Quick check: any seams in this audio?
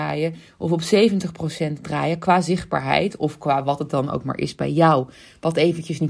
no; 0 cuts

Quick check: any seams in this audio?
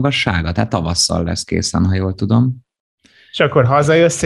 no; 0 cuts

